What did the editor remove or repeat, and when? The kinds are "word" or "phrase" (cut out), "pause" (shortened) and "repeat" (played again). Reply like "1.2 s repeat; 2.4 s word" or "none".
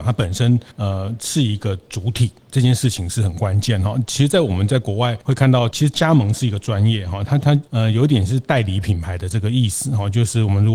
5.7 s word